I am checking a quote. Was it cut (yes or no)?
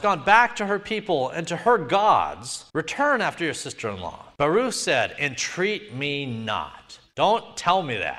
yes